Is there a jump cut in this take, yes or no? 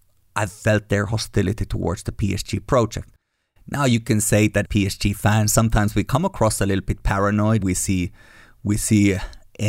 yes